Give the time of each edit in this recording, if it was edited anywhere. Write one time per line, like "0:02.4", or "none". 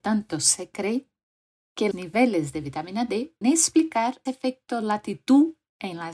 0:01.9
0:03.4
0:04.3